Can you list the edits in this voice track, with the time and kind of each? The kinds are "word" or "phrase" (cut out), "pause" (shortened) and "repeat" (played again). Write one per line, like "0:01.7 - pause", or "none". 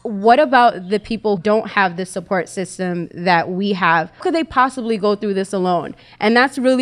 0:01.4 - word
0:04.2 - phrase